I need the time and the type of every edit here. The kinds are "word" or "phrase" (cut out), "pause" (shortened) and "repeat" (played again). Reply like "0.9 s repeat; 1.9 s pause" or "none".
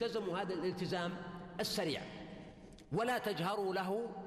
none